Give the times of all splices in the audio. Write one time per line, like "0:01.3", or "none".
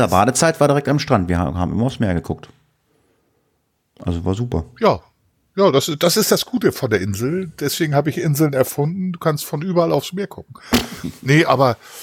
none

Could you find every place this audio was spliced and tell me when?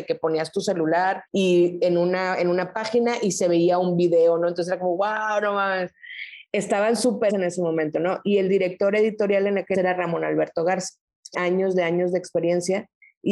0:01.3
0:07.3
0:09.7
0:11.3

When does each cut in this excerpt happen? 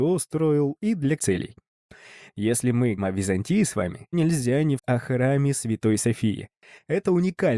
0:01.2
0:03.0
0:04.1
0:04.8

